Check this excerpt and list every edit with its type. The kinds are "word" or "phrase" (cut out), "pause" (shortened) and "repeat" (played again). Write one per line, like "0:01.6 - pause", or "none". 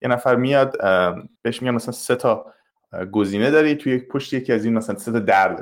0:01.4 - pause